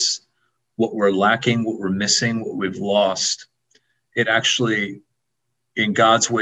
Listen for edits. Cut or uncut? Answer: uncut